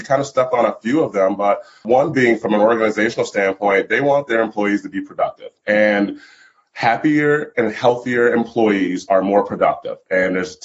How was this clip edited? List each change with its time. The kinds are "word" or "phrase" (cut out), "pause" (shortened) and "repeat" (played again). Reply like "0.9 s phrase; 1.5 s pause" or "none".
5.6 s pause

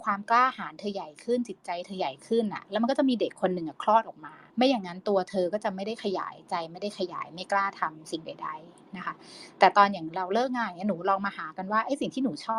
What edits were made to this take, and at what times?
4.5 s pause

